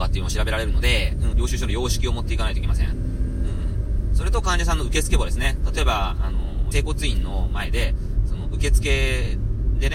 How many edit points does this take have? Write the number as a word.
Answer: two